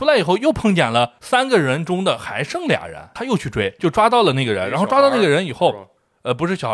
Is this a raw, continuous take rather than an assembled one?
no; 1 cut; at 3.8 s

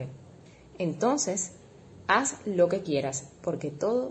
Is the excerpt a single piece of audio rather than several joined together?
yes; 0 cuts

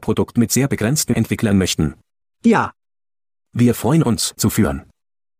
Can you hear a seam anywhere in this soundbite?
yes; 4 cuts; at 1.1 s, 1.5 s, 2.2 s, 4.4 s

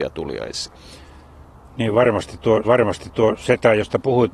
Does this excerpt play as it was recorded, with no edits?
no; 1 cut; at 2.6 s

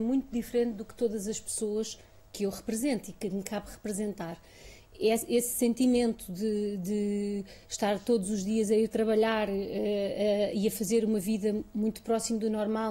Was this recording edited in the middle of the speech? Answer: no; 0 cuts

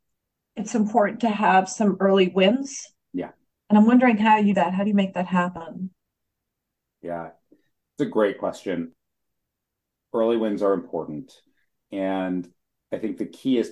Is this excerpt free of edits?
no; 1 cut; at 4.5 s

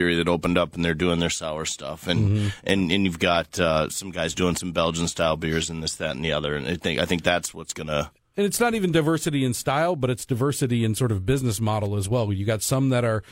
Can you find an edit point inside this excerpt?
no; 0 cuts

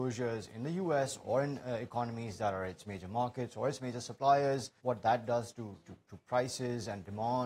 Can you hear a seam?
yes; 1 cut; at 4.8 s

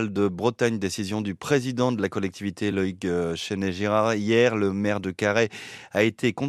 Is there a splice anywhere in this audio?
no; 0 cuts

